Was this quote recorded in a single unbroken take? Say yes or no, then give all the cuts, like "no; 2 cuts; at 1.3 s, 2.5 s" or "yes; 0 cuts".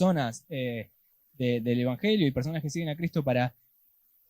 yes; 0 cuts